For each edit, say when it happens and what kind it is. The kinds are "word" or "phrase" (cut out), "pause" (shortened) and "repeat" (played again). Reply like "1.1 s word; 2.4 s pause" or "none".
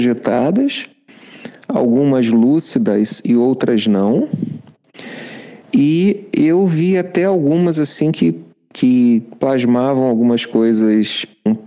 5.6 s pause